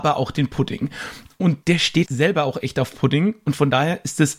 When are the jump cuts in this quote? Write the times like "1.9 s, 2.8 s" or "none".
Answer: 1.6 s, 2.0 s